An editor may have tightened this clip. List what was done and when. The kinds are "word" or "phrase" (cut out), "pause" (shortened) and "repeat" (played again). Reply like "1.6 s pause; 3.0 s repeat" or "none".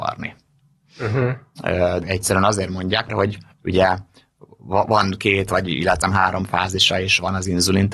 2.0 s word; 3.1 s word; 3.5 s pause; 6.0 s word